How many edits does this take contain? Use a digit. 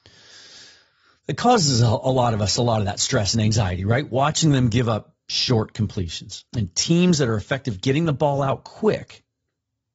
1